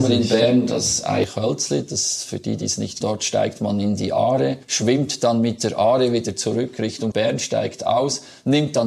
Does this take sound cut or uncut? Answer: cut